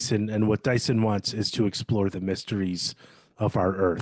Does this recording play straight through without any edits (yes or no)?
yes